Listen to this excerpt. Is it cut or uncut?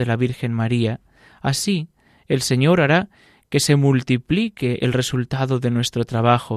uncut